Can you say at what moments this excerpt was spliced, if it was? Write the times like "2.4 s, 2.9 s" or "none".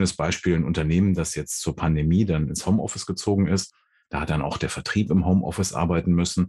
none